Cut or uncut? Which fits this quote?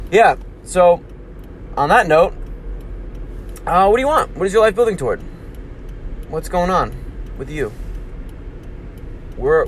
uncut